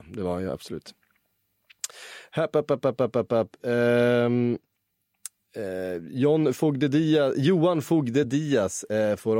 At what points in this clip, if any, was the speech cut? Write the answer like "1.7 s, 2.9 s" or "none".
none